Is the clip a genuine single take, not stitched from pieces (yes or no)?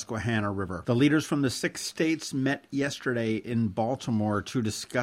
yes